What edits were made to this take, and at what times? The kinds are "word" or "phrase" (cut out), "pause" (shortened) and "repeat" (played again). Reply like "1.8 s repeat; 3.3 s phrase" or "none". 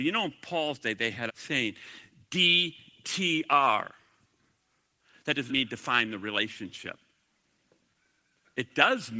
1.3 s word; 5.5 s word